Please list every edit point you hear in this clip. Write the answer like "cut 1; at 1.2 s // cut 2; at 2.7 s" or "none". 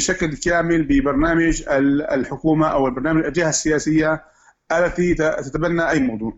none